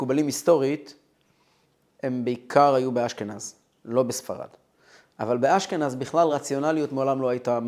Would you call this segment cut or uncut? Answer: uncut